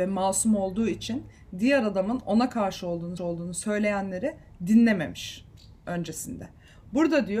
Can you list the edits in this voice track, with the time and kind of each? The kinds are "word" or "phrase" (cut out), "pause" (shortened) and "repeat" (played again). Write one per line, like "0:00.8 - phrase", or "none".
0:03.2 - repeat